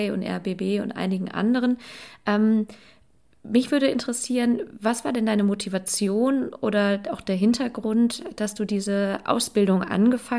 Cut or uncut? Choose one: uncut